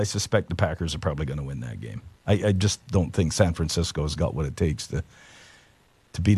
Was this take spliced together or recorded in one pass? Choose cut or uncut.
cut